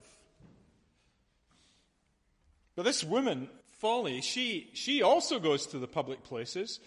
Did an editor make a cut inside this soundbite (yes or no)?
yes